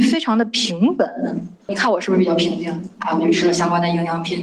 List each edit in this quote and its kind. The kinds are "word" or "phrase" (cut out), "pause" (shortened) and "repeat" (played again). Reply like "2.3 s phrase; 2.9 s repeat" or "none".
2.9 s pause